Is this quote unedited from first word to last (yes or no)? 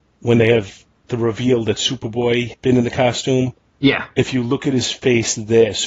no